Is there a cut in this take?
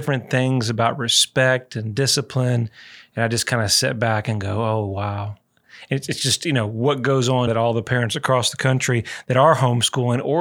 yes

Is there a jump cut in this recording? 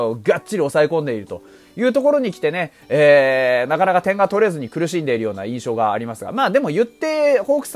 no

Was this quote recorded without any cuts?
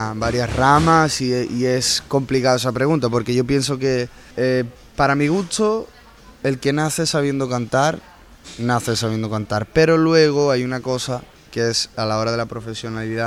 no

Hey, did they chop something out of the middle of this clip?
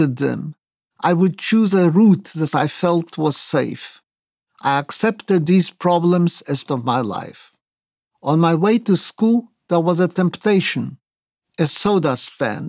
yes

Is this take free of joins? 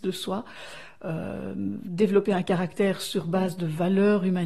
yes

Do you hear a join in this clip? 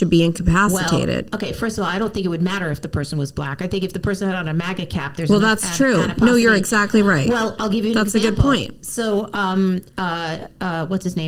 no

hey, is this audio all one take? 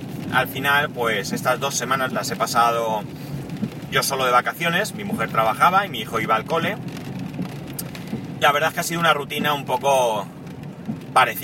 no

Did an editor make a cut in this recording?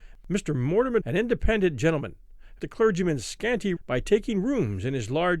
yes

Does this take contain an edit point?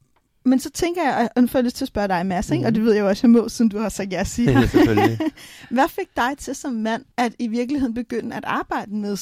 yes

